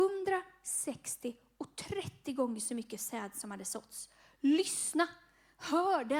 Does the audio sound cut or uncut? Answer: uncut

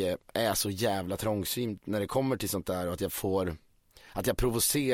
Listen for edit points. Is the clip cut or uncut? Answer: uncut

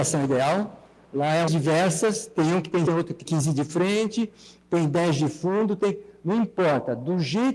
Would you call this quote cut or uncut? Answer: cut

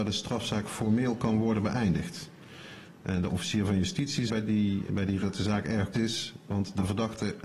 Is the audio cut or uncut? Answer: cut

